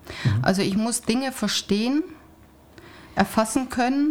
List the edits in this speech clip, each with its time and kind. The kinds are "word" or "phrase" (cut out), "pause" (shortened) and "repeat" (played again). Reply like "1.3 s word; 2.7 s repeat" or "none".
none

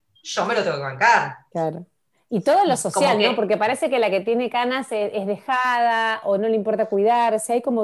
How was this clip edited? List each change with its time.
none

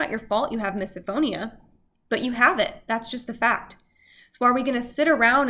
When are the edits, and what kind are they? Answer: none

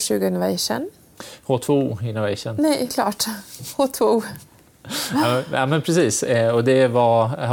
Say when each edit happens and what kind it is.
2.9 s word

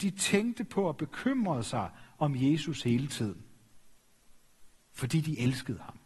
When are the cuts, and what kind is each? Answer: 4.8 s pause

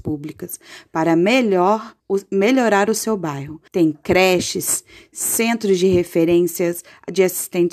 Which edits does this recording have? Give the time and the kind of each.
2.0 s pause; 3.7 s pause

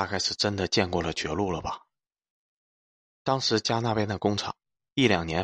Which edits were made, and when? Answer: none

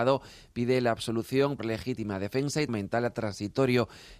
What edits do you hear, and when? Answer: 1.6 s word; 2.7 s word

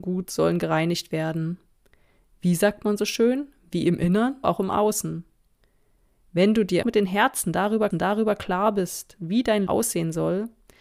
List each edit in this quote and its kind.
4.4 s word; 6.8 s phrase; 7.9 s repeat; 9.7 s word

